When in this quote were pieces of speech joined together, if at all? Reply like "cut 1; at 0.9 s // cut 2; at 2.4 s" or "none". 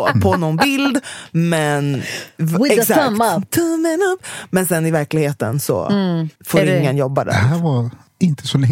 cut 1; at 6.4 s